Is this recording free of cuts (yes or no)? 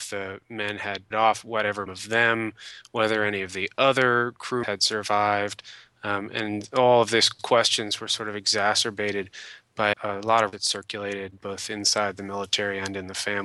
no